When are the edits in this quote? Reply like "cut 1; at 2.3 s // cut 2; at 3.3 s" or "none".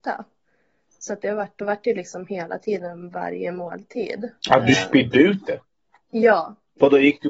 cut 1; at 4.4 s